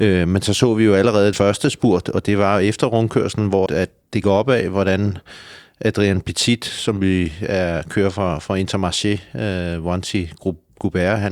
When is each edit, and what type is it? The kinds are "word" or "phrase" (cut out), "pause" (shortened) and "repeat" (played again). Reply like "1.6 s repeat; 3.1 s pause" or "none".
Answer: 1.3 s word; 3.7 s word; 4.2 s word